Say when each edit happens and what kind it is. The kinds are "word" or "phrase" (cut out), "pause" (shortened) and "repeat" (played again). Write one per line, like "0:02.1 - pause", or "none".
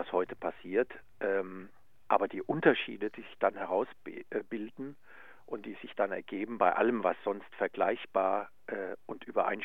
none